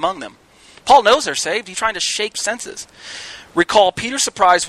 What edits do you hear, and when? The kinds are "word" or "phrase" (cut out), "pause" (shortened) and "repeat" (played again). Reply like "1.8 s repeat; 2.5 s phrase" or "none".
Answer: 1.7 s word; 2.3 s phrase

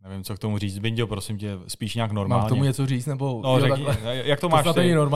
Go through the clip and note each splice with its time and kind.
none

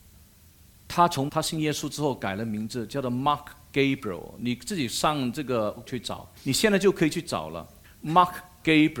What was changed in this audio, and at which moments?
1.3 s word; 5.9 s word; 6.4 s pause; 7.8 s pause

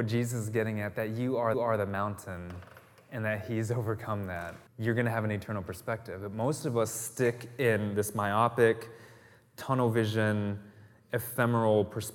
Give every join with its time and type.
1.5 s repeat; 4.7 s pause

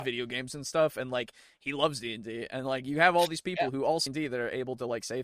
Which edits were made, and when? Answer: 4.1 s phrase

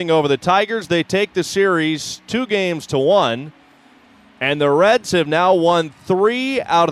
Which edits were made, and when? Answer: none

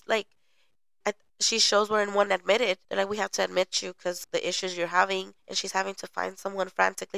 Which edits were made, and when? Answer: 2.3 s phrase; 2.8 s pause; 4.2 s word; 5.4 s pause

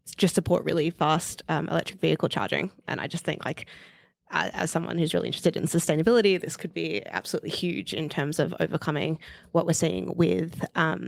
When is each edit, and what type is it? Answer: none

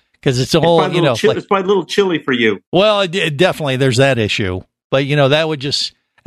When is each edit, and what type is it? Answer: none

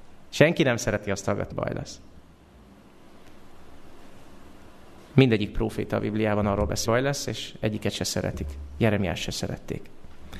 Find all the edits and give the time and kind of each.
1.5 s word; 5.1 s pause; 6.9 s word

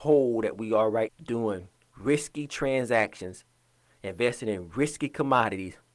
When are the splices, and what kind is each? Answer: 1.1 s word

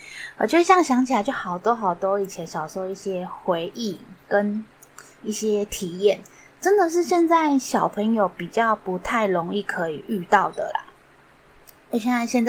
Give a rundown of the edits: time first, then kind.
4.2 s pause

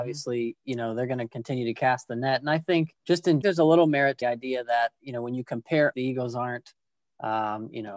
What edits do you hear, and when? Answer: 3.0 s pause; 3.4 s phrase; 4.2 s word; 5.9 s word

